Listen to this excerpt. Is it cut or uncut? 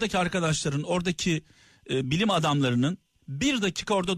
uncut